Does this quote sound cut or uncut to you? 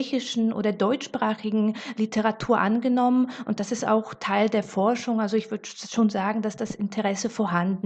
uncut